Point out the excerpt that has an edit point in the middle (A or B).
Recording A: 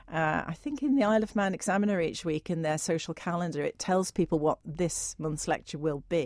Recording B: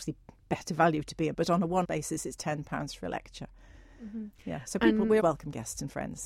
B